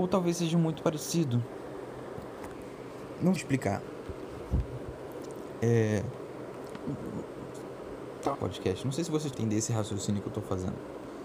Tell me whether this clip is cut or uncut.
cut